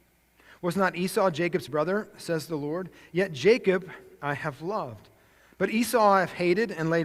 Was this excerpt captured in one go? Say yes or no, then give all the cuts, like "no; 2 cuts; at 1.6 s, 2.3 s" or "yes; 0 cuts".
yes; 0 cuts